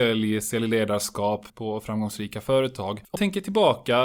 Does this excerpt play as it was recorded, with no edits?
no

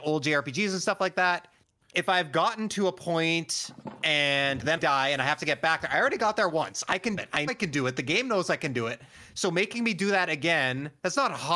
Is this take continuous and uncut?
no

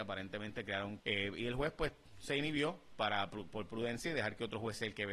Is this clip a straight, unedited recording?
no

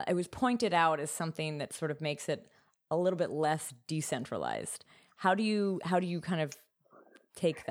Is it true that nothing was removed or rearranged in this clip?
yes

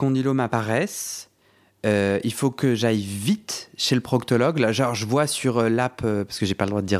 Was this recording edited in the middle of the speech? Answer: no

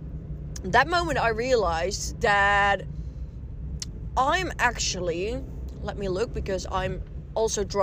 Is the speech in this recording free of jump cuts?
yes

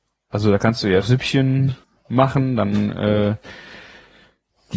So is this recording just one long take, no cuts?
no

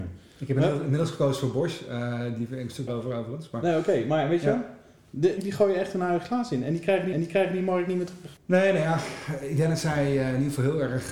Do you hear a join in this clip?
yes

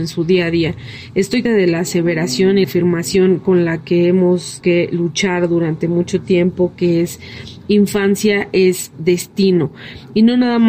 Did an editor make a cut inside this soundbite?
yes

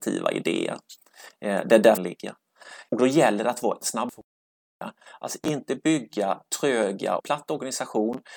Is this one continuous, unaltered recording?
no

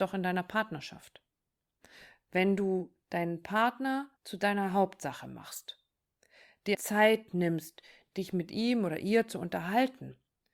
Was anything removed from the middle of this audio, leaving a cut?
yes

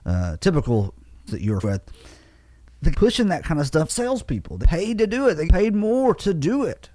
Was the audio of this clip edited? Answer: yes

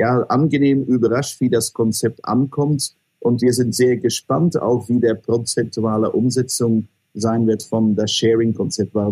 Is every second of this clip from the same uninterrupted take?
yes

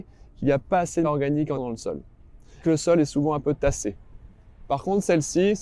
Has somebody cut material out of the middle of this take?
yes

